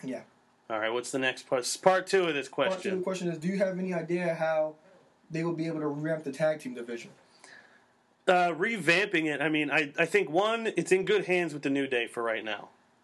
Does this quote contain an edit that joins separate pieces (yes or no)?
yes